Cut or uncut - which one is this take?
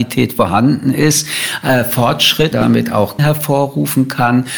cut